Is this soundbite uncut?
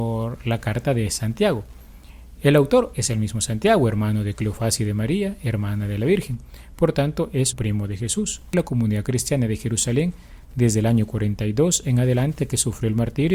no; 3 cuts; at 7.5 s, 8.5 s, 12.4 s

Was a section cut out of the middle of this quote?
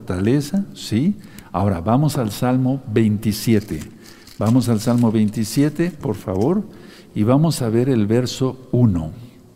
no; 0 cuts

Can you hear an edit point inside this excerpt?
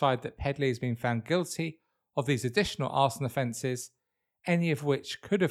no; 0 cuts

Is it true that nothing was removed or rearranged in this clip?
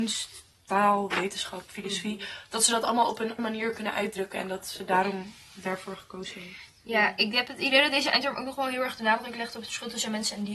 no; 1 cut; at 3.4 s

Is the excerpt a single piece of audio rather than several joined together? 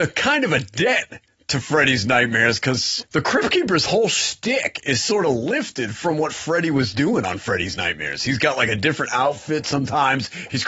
yes; 0 cuts

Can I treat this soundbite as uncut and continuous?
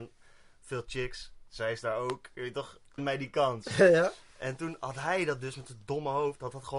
no; 1 cut; at 3.0 s

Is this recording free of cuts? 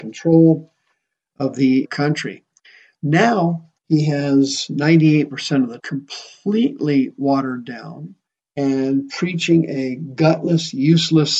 no; 4 cuts; at 1.8 s, 3.8 s, 5.8 s, 8.3 s

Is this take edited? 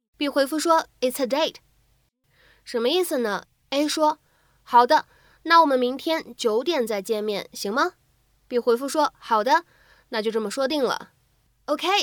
no; 0 cuts

